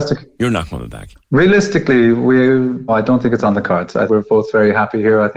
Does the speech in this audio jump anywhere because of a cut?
yes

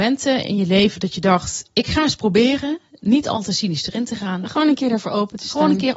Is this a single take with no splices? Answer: yes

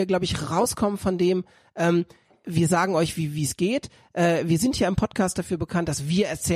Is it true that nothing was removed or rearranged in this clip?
yes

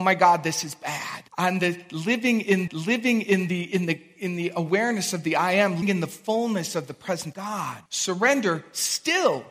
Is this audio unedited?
no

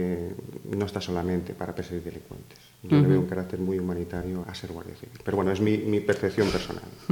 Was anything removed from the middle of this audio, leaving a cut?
yes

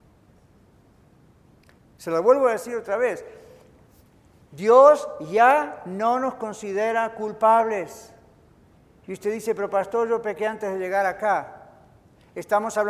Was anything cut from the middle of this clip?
no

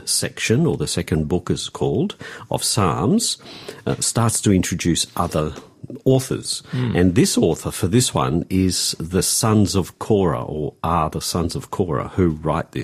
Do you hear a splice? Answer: no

